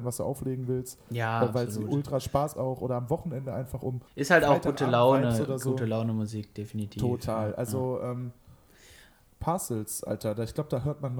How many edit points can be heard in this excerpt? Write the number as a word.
two